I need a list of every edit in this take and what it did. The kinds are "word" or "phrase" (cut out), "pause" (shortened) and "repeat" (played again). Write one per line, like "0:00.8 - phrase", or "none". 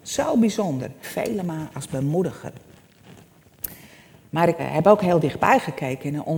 0:01.0 - word
0:04.6 - word